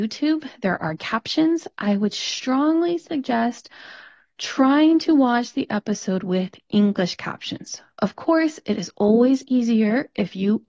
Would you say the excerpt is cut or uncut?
uncut